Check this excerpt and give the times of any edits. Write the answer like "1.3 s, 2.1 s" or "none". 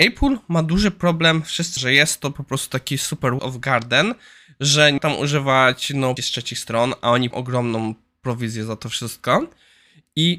1.8 s, 3.4 s, 5.0 s, 6.2 s, 7.3 s